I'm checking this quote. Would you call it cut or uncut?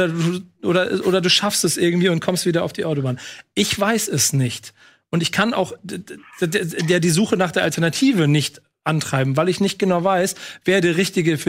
uncut